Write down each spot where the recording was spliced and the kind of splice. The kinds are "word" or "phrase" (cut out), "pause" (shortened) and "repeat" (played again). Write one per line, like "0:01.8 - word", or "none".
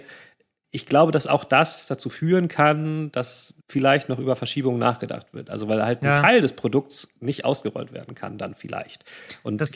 0:03.6 - pause